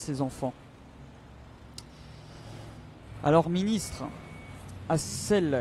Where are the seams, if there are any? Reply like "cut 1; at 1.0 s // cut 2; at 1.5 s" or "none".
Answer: cut 1; at 3.4 s